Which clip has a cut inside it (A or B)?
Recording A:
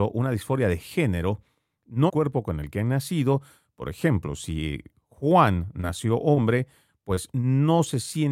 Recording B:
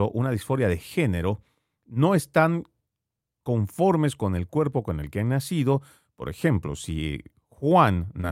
A